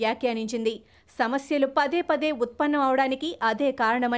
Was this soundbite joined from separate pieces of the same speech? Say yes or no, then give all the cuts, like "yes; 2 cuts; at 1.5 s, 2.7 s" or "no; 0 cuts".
no; 0 cuts